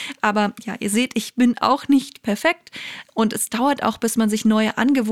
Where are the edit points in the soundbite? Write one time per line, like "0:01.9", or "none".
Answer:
none